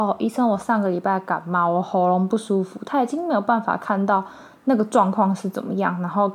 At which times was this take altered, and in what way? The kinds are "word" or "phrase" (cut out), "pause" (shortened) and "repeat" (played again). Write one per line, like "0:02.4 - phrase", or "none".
none